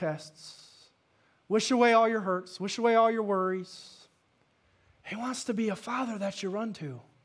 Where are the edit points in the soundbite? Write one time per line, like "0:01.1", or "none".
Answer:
none